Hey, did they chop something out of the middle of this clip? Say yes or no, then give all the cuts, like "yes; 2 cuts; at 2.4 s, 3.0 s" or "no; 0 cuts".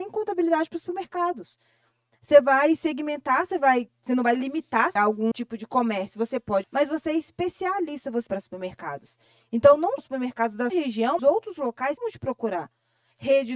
yes; 8 cuts; at 5.0 s, 5.3 s, 6.6 s, 8.3 s, 10.0 s, 10.7 s, 11.2 s, 12.0 s